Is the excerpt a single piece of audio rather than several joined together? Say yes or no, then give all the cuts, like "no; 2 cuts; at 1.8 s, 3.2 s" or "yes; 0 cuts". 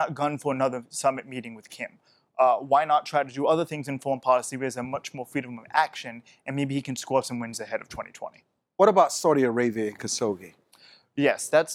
yes; 0 cuts